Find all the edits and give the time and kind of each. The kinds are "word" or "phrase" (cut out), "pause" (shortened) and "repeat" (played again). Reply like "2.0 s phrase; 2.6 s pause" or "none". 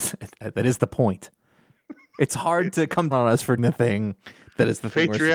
2.3 s word; 3.1 s word; 3.6 s word